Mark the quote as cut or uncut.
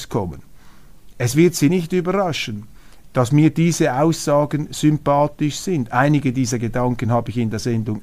uncut